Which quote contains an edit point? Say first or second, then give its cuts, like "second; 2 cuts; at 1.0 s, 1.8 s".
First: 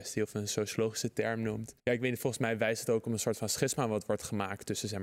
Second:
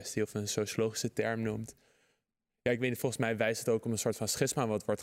first; 1 cut; at 1.8 s